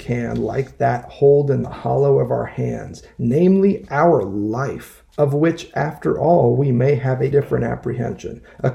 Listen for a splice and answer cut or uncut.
cut